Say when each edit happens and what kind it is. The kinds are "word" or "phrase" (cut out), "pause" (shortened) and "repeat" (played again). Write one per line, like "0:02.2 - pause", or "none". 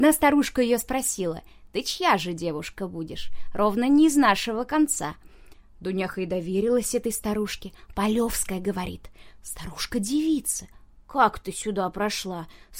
none